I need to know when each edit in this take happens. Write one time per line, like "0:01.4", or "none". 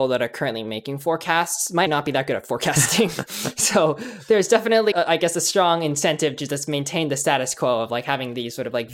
0:01.9
0:04.9